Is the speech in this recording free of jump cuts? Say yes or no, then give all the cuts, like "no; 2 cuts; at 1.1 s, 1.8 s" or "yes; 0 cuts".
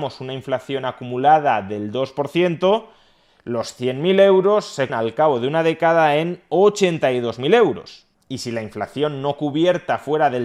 no; 1 cut; at 4.9 s